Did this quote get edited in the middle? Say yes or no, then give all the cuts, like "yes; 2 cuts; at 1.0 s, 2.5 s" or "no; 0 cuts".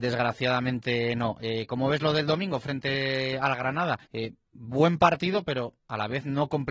yes; 2 cuts; at 4.0 s, 5.8 s